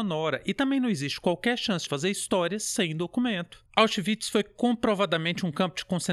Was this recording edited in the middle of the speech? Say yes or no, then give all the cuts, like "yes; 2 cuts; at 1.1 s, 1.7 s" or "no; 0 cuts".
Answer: yes; 2 cuts; at 1.9 s, 3.7 s